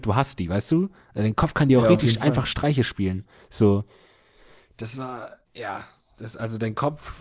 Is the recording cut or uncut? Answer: cut